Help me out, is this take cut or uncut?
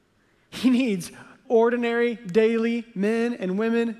cut